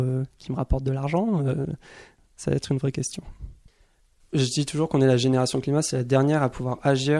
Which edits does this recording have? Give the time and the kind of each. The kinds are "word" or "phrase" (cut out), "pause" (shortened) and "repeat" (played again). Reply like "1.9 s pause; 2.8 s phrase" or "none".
none